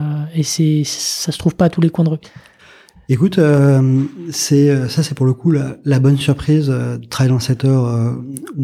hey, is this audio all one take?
yes; 0 cuts

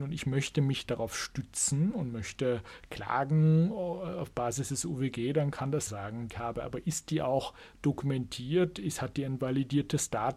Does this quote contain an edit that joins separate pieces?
yes; 2 cuts; at 5.9 s, 6.3 s

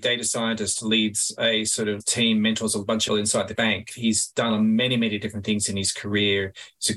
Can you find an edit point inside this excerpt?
yes; 3 cuts; at 2.0 s, 3.1 s, 3.6 s

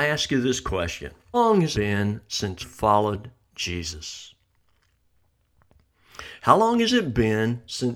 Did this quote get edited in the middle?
yes; 3 cuts; at 1.3 s, 1.7 s, 2.6 s

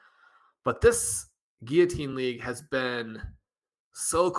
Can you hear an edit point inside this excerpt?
no; 0 cuts

